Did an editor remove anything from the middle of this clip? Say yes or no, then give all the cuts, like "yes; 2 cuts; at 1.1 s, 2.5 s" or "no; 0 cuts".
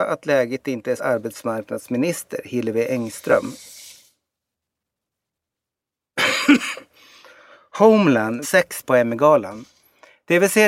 yes; 3 cuts; at 1.0 s, 8.4 s, 8.8 s